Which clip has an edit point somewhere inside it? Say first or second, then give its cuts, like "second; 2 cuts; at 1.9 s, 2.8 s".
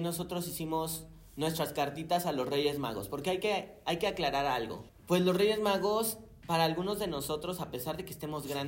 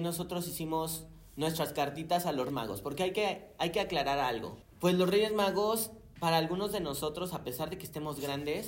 second; 1 cut; at 2.5 s